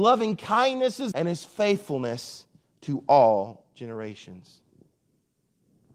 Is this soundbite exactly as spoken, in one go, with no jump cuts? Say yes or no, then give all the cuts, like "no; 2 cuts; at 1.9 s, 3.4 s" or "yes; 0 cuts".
no; 1 cut; at 1.1 s